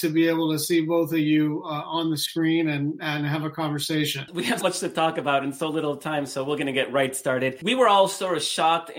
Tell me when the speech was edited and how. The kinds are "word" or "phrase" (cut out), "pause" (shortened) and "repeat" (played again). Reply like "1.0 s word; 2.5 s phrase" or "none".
4.6 s word